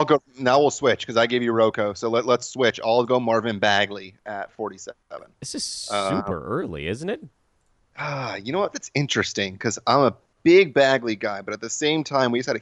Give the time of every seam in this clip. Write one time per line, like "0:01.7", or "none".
none